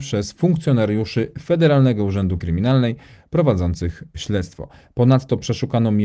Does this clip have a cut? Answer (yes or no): yes